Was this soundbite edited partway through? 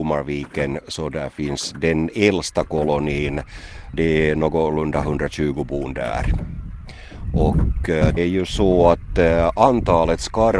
yes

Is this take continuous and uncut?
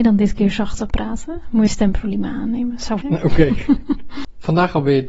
no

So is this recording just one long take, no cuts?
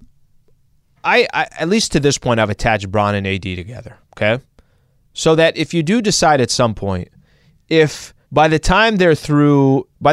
no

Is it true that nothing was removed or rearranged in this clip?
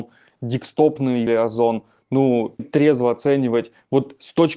no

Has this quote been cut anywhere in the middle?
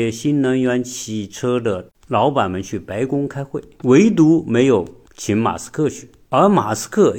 no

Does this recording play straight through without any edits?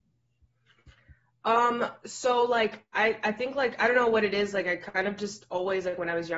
yes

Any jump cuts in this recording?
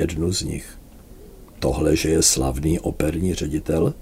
no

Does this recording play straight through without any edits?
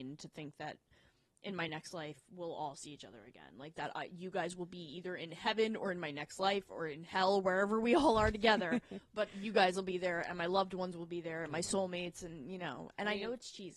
yes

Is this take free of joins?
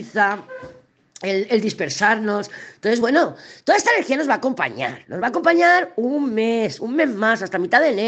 yes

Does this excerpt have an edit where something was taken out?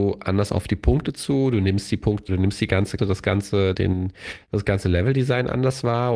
yes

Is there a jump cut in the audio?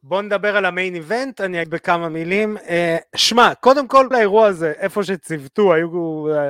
yes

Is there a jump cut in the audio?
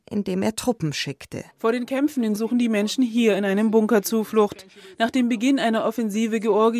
yes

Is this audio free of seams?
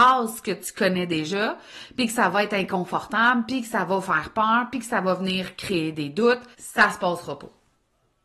no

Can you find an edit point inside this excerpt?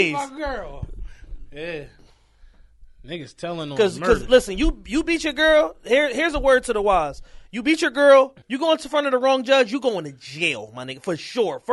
yes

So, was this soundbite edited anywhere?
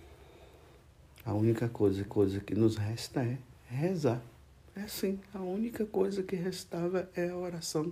yes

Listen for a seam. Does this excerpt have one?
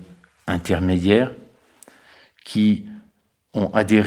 no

